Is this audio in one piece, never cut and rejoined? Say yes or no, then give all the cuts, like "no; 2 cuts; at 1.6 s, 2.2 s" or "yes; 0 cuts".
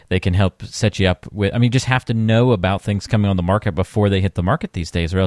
yes; 0 cuts